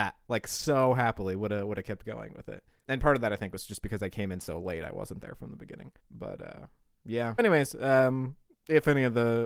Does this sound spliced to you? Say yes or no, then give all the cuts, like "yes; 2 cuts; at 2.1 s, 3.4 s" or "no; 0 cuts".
yes; 2 cuts; at 6.0 s, 7.4 s